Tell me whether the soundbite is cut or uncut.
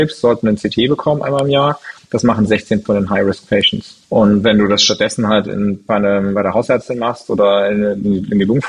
cut